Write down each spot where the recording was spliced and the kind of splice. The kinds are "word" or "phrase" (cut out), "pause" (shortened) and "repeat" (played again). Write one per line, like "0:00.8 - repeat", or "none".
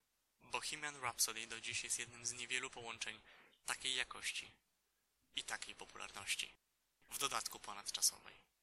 none